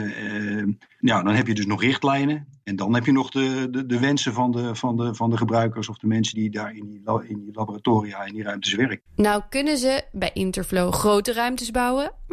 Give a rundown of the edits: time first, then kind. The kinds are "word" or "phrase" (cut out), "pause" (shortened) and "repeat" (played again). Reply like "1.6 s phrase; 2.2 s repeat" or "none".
6.3 s word; 9.1 s pause

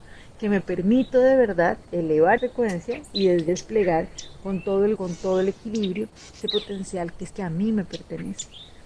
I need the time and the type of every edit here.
2.4 s word; 3.5 s word; 5.0 s word; 6.4 s word; 7.3 s word

